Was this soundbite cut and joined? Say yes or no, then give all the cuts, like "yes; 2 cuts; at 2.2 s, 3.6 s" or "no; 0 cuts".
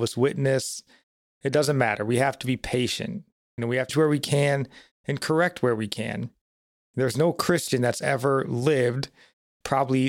yes; 1 cut; at 3.9 s